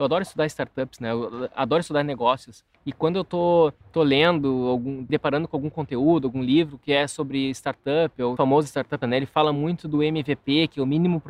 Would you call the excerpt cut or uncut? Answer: cut